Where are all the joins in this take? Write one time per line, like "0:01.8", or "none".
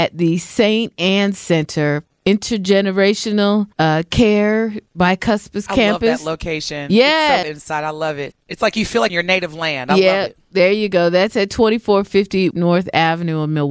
0:02.1
0:03.7
0:04.9
0:07.4
0:08.3
0:09.1
0:12.5